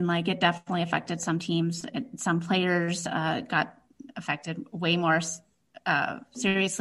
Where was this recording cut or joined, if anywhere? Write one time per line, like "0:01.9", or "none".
none